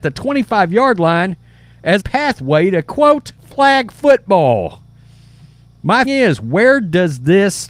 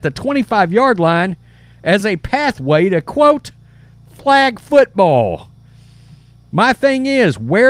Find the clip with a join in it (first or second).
first